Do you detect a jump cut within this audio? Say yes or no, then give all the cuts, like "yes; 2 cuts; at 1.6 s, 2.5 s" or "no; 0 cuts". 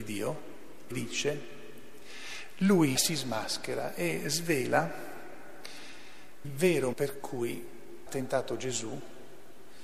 yes; 5 cuts; at 0.9 s, 3.0 s, 6.4 s, 6.9 s, 8.1 s